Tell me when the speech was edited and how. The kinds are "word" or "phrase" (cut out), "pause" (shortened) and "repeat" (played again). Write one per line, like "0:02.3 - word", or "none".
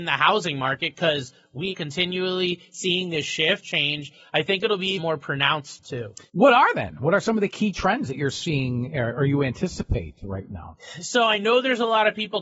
0:01.7 - word
0:03.6 - phrase
0:05.0 - word
0:05.8 - word
0:06.3 - pause